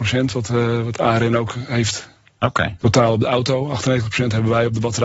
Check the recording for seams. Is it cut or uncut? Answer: uncut